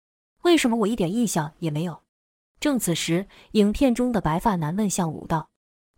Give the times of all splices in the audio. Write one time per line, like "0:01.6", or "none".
0:02.1